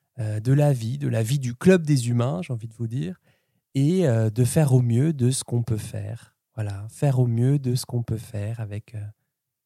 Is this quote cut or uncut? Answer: uncut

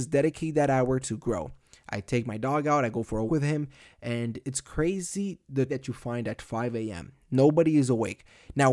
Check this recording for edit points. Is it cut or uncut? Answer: cut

